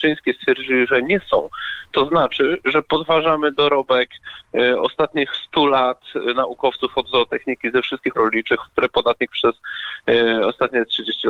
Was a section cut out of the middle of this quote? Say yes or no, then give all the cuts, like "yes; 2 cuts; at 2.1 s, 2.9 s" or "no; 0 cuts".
yes; 2 cuts; at 8.1 s, 8.7 s